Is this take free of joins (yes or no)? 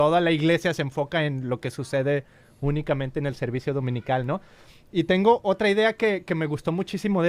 yes